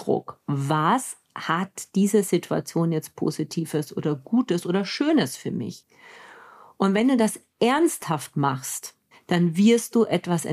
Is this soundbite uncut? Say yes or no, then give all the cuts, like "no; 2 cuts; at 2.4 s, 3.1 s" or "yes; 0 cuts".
yes; 0 cuts